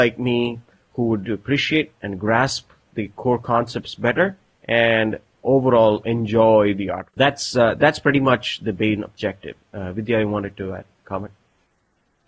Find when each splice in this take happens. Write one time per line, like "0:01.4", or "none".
0:01.2
0:04.5
0:07.1